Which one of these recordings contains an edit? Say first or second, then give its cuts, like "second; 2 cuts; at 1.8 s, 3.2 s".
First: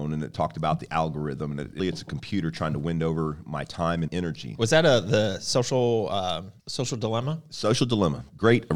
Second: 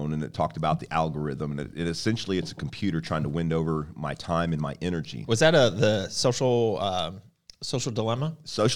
first; 3 cuts; at 1.8 s, 4.1 s, 6.6 s